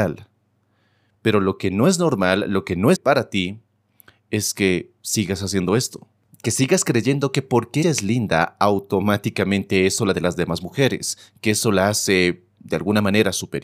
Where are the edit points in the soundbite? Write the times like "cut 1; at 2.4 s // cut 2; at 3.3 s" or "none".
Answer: cut 1; at 2.9 s // cut 2; at 7.8 s // cut 3; at 10.1 s